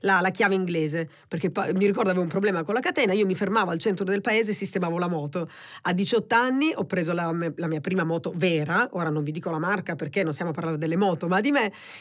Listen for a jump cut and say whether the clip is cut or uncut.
uncut